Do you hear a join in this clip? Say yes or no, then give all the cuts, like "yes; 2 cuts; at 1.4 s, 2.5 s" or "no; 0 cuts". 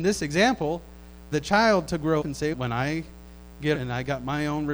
yes; 4 cuts; at 1.3 s, 2.2 s, 2.5 s, 3.7 s